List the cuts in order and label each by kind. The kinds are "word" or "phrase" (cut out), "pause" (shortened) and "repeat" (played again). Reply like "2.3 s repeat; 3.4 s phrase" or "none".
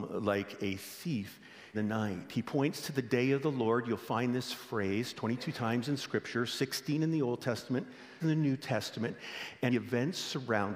1.7 s word; 8.2 s word; 9.7 s phrase